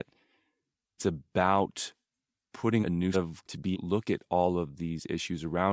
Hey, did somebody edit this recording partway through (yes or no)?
yes